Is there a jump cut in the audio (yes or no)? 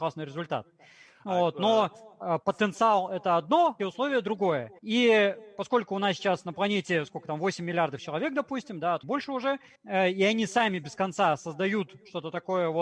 yes